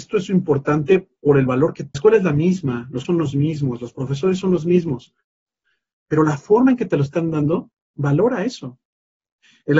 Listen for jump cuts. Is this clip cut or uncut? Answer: cut